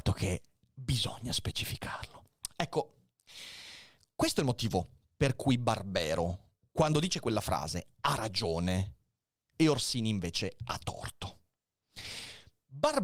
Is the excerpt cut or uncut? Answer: uncut